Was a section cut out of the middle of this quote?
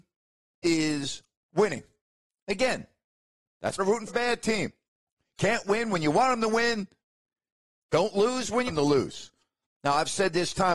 yes; 3 cuts; at 3.8 s, 4.1 s, 8.7 s

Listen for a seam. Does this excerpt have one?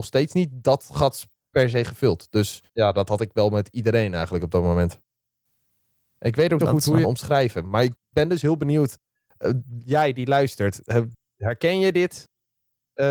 yes; 3 cuts; at 2.7 s, 6.6 s, 7.0 s

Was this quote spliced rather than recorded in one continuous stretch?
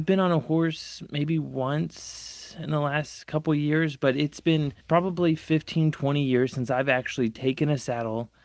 yes; 1 cut; at 4.8 s

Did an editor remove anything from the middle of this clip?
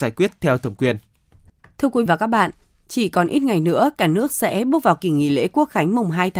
yes; 1 cut; at 2.1 s

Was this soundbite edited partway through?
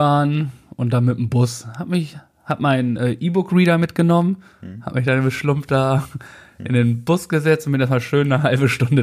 no; 0 cuts

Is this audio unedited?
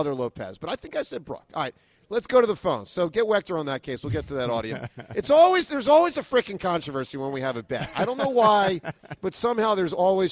yes; 0 cuts

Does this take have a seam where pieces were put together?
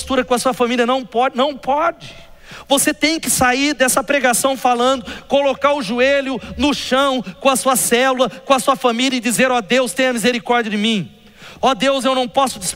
no; 0 cuts

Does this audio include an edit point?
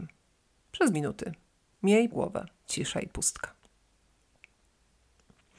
yes; 3 cuts; at 0.9 s, 2.1 s, 2.6 s

